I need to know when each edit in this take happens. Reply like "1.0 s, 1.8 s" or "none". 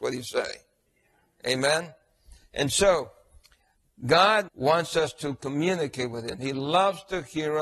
4.5 s